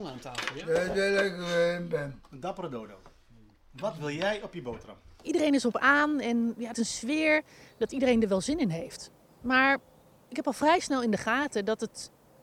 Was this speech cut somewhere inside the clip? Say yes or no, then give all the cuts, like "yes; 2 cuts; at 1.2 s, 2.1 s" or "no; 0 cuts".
yes; 1 cut; at 6.7 s